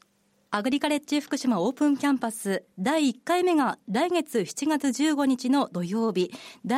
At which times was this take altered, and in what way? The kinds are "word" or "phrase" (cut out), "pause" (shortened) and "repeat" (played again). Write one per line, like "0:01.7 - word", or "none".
none